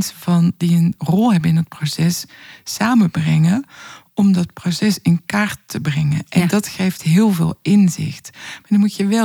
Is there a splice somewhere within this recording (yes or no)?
no